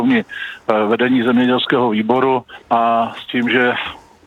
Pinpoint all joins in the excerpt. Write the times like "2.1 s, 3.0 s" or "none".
2.6 s

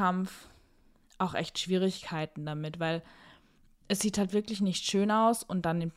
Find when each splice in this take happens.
none

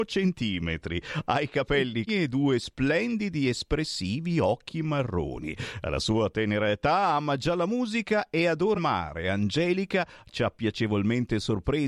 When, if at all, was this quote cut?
2.1 s, 8.7 s

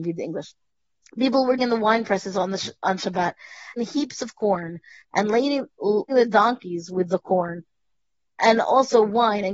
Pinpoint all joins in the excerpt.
1.6 s, 3.8 s, 6.1 s

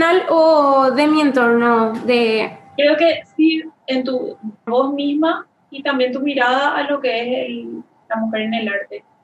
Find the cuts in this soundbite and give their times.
3.8 s, 4.7 s

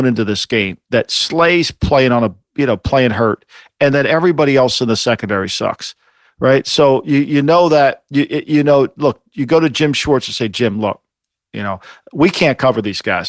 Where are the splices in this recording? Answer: none

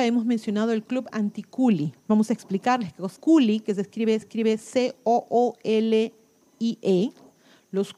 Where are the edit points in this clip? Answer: 2.0 s, 3.2 s, 4.2 s

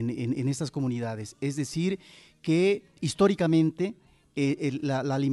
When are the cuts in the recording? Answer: none

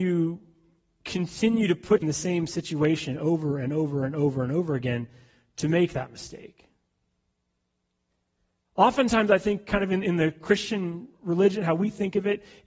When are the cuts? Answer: 2.0 s

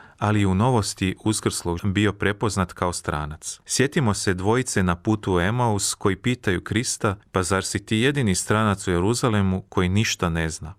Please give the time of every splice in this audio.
1.8 s, 3.6 s, 7.2 s

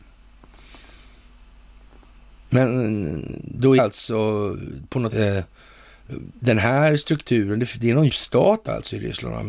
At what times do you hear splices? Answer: 3.8 s, 5.1 s, 8.1 s

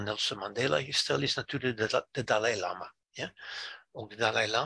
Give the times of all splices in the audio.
3.0 s

